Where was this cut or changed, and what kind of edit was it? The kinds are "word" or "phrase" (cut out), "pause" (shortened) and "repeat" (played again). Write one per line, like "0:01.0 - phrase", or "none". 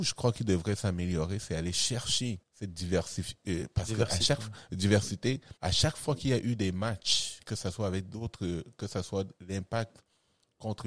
0:02.4 - pause
0:05.6 - pause